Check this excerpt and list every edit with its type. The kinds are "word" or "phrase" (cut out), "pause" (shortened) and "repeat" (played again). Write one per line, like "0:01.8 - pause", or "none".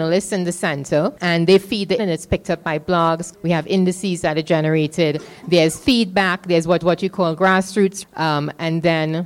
0:01.2 - pause
0:02.0 - word
0:03.3 - word
0:06.8 - repeat
0:08.0 - word

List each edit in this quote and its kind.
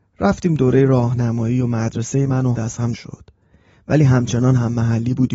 0:02.5 - word
0:02.9 - word

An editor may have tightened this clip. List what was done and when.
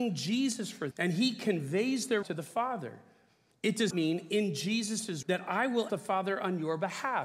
0:00.9 - word
0:02.2 - word
0:03.9 - word
0:05.2 - word
0:05.9 - word

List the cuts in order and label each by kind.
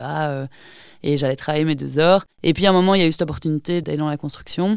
0:02.3 - pause

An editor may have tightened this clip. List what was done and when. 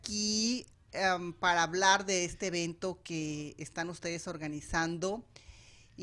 none

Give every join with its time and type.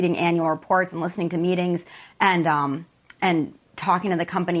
none

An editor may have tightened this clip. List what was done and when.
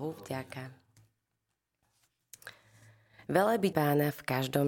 0:03.7 - word

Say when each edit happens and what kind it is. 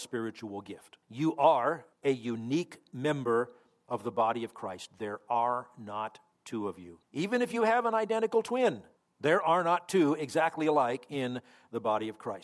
0:01.0 - pause
0:01.9 - pause
0:07.0 - pause
0:09.0 - pause

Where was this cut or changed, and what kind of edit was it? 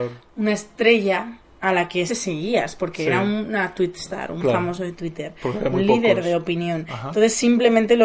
0:02.1 - word

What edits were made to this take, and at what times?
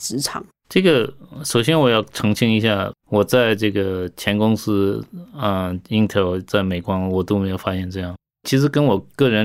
0:03.0 - pause

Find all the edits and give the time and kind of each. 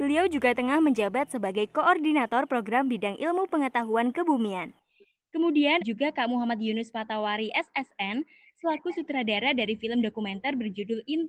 0:05.8 - word

